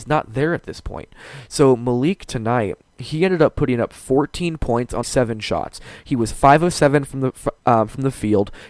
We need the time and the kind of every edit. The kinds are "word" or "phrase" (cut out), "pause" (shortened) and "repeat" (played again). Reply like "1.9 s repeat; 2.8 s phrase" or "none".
5.0 s word

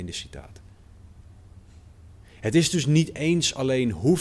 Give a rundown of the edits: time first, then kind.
none

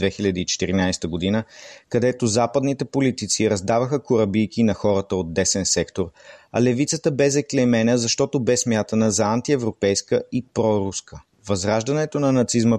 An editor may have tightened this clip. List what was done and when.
11.3 s pause

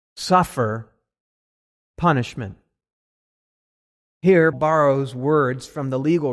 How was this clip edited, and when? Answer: 4.5 s word

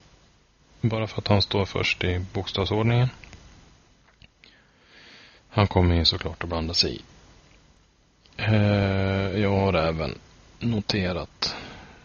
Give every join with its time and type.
none

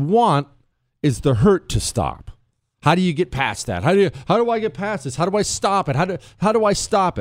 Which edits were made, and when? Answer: none

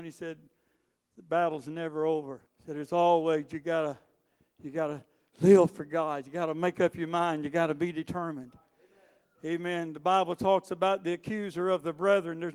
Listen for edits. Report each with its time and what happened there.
2.5 s pause

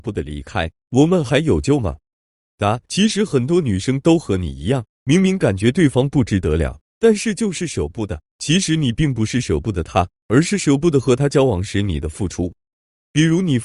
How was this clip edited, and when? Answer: 2.8 s pause; 8.3 s pause

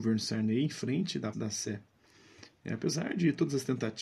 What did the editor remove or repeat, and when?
1.3 s word

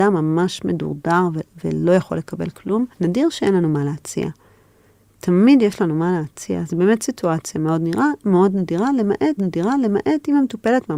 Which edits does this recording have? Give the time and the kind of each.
2.9 s pause; 9.4 s repeat

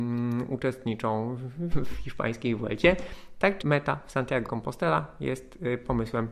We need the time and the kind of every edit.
1.7 s word; 3.6 s word; 4.5 s word

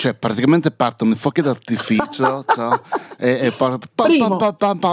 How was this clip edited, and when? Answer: none

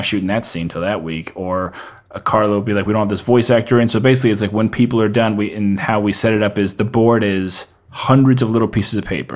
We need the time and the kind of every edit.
none

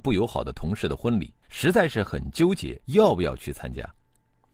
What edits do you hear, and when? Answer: 1.4 s pause; 2.8 s pause

